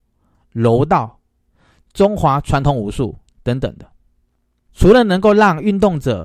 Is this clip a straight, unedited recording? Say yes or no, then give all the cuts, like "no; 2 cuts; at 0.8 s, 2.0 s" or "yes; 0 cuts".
yes; 0 cuts